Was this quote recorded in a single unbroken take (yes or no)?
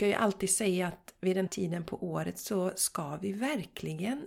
no